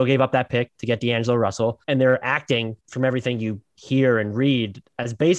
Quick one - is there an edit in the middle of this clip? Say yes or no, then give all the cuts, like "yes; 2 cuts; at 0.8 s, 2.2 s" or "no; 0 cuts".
yes; 2 cuts; at 1.8 s, 2.8 s